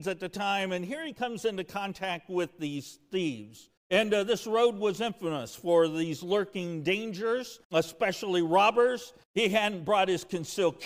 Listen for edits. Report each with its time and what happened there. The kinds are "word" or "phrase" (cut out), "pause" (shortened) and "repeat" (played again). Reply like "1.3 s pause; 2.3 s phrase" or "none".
3.8 s pause; 7.6 s pause; 9.2 s pause